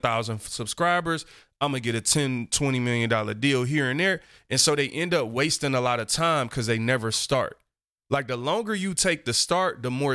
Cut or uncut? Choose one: uncut